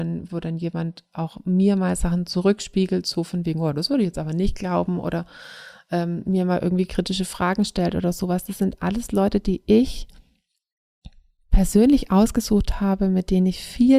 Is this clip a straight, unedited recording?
yes; 0 cuts

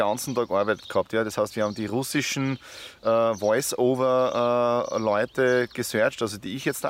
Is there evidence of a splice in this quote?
no; 0 cuts

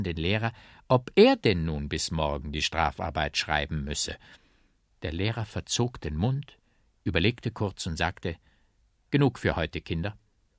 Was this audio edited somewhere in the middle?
no; 0 cuts

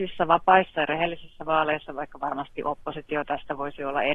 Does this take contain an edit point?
no; 0 cuts

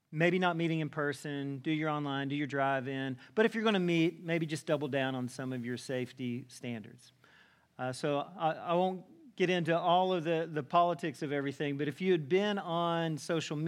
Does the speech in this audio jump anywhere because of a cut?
no; 0 cuts

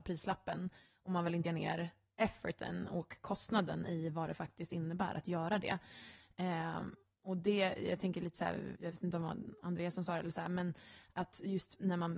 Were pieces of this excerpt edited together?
yes; 2 cuts; at 1.5 s, 8.8 s

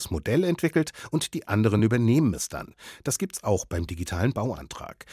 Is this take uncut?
yes; 0 cuts

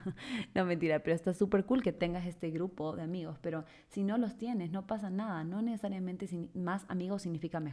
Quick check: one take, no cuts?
yes; 0 cuts

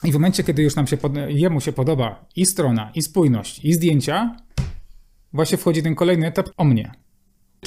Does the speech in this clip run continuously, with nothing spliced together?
no; 1 cut; at 6.5 s

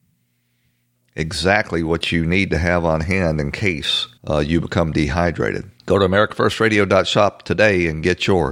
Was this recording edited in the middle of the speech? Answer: yes; 2 cuts; at 4.2 s, 5.8 s

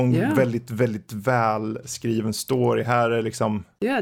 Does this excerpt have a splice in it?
no; 0 cuts

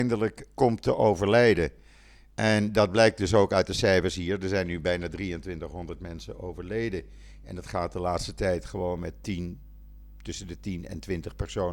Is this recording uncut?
yes; 0 cuts

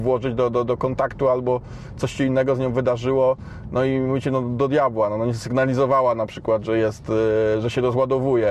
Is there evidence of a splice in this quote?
no; 0 cuts

